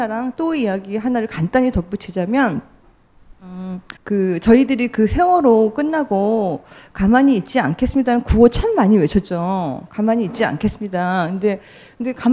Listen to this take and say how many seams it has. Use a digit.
1